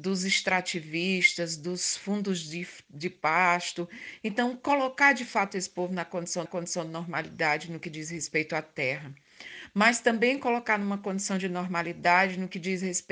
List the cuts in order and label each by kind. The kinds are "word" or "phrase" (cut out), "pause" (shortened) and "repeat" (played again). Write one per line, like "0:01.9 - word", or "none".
0:06.5 - repeat